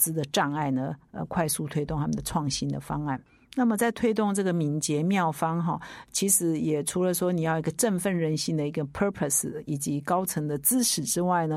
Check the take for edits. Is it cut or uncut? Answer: uncut